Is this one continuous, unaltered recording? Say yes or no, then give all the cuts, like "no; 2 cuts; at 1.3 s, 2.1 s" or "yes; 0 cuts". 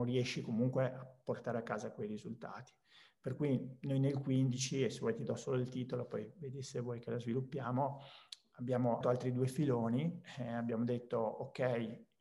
no; 1 cut; at 9.0 s